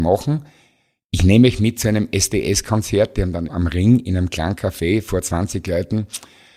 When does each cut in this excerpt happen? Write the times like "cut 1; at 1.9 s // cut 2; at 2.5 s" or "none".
cut 1; at 3.5 s